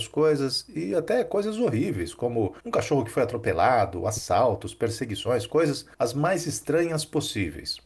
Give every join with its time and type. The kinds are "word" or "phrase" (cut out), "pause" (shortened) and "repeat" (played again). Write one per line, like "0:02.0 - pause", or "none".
none